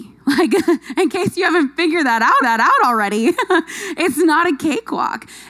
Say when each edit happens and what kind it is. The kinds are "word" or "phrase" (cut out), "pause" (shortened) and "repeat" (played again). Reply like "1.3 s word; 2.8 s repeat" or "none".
2.4 s repeat

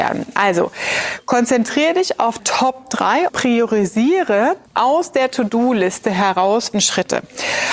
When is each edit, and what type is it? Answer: 2.4 s word; 3.3 s word; 4.7 s pause; 6.7 s phrase

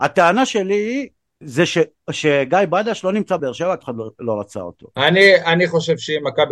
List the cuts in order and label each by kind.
3.4 s word; 3.8 s word

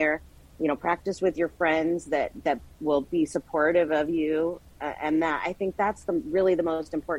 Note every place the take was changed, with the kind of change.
none

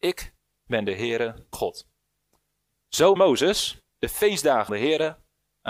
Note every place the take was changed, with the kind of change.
1.5 s word; 3.2 s word; 3.9 s pause; 4.7 s word

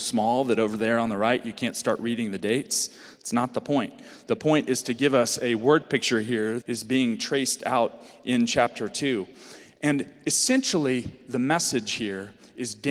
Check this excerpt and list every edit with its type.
6.6 s word

